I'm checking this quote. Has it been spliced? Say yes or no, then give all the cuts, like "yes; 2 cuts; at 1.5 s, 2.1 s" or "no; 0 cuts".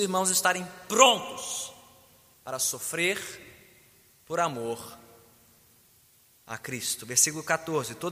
no; 0 cuts